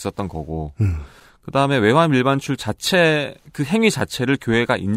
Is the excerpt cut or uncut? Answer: uncut